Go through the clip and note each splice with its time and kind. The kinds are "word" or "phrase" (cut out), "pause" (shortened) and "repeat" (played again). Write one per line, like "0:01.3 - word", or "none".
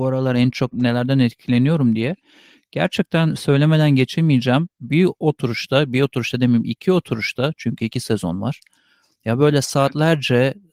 none